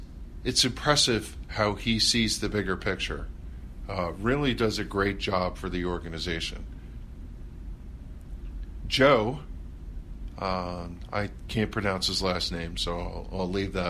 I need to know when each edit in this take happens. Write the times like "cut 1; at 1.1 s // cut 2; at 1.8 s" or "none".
none

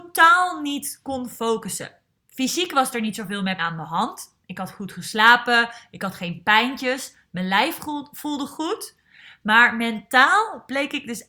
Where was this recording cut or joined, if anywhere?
cut 1; at 3.6 s

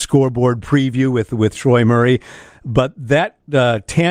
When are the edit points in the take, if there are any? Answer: none

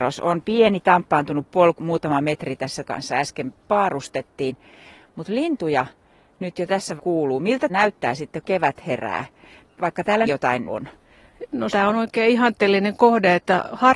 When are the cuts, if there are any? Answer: cut 1; at 1.8 s // cut 2; at 2.9 s // cut 3; at 7.0 s // cut 4; at 7.7 s // cut 5; at 8.4 s // cut 6; at 10.2 s // cut 7; at 10.7 s // cut 8; at 11.7 s

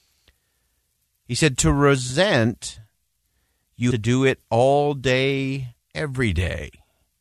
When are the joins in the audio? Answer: cut 1; at 3.9 s // cut 2; at 5.8 s

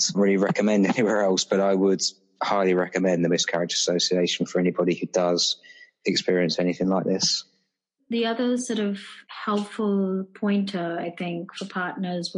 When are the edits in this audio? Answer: none

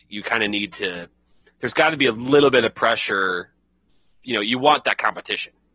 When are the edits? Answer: none

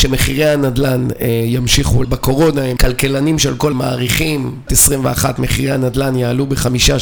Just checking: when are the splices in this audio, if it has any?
cut 1; at 2.0 s // cut 2; at 2.8 s // cut 3; at 3.7 s // cut 4; at 4.7 s

